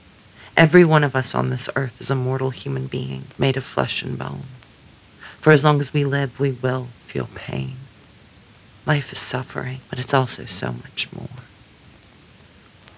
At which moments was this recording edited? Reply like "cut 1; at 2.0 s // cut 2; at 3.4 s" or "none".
cut 1; at 3.3 s // cut 2; at 9.9 s